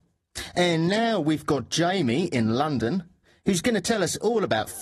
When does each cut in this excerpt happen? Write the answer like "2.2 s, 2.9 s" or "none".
none